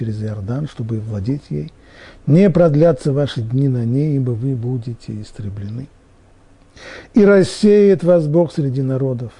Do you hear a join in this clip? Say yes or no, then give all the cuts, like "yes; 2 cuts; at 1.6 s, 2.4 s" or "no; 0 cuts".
no; 0 cuts